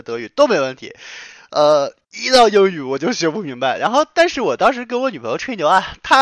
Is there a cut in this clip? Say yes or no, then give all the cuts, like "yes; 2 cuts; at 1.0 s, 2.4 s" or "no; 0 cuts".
no; 0 cuts